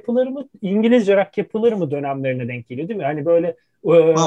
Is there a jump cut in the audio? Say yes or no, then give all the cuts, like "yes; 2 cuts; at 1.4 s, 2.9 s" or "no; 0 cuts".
no; 0 cuts